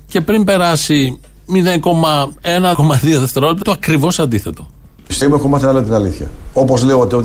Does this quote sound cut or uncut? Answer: cut